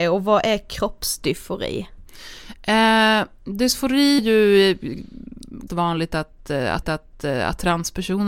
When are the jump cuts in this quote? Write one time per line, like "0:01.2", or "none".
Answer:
0:04.2
0:05.7
0:06.8